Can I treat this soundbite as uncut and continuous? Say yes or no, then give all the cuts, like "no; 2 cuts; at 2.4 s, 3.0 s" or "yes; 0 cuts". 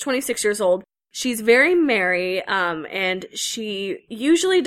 yes; 0 cuts